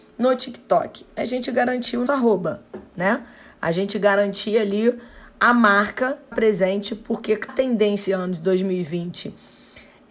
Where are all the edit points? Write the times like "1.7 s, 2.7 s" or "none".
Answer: 2.1 s, 6.3 s, 7.5 s, 8.1 s